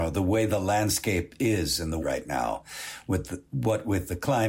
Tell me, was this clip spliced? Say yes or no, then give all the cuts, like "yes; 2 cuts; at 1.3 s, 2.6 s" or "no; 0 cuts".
yes; 1 cut; at 2.0 s